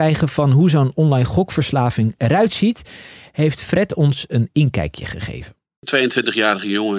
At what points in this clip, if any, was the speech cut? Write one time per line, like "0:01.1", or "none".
none